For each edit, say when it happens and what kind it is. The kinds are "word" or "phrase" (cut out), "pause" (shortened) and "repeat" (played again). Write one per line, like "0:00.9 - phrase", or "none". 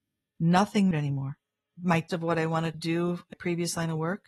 0:00.9 - word
0:02.1 - word
0:02.7 - word
0:03.3 - word